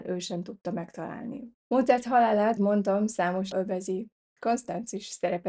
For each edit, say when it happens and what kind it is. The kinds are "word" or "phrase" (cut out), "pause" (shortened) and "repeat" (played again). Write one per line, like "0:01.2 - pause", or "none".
0:01.6 - pause
0:02.6 - word
0:03.5 - word